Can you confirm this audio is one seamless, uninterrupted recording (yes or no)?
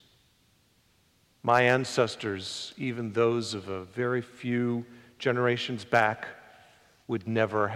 yes